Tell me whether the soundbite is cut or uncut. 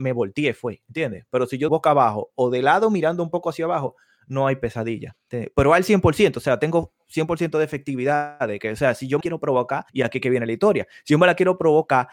cut